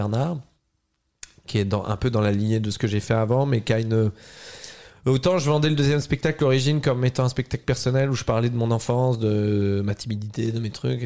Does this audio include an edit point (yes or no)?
no